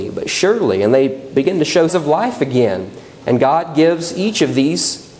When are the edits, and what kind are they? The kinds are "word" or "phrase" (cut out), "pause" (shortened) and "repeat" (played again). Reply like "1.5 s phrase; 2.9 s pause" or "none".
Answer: 1.9 s word

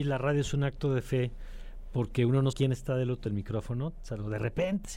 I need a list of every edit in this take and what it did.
2.5 s word; 3.3 s word

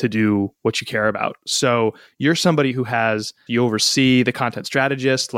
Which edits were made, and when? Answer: 3.5 s word

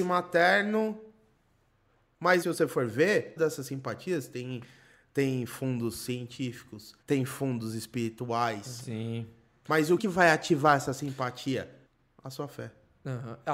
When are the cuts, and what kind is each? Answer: 2.4 s word; 3.4 s word; 7.0 s pause; 10.0 s word; 11.9 s pause

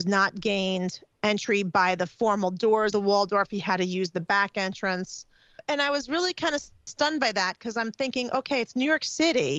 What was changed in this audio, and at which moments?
2.9 s word

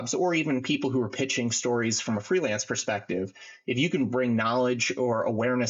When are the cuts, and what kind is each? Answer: none

